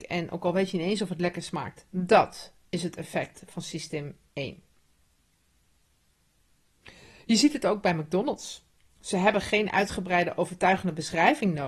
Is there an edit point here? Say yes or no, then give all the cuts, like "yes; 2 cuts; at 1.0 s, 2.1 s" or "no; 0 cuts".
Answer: no; 0 cuts